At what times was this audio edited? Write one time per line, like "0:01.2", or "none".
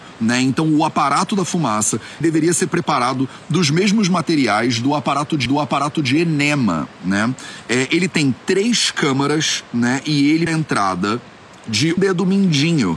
0:02.2
0:05.5
0:10.5
0:12.0